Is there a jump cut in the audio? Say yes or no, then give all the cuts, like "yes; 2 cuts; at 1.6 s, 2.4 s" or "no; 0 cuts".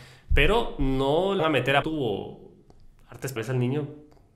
yes; 3 cuts; at 1.4 s, 1.8 s, 3.4 s